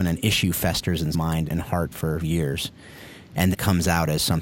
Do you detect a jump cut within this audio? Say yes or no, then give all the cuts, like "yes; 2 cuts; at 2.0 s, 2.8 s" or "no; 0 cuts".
yes; 4 cuts; at 1.1 s, 1.5 s, 2.2 s, 3.5 s